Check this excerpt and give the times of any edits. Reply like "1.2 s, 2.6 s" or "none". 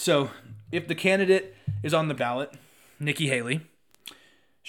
2.2 s